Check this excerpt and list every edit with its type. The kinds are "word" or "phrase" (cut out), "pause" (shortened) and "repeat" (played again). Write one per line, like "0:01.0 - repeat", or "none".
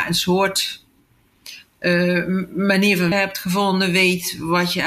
0:03.1 - word